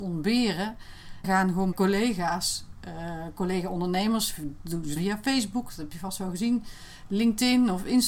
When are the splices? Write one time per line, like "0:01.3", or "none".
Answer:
0:01.2
0:01.7
0:05.0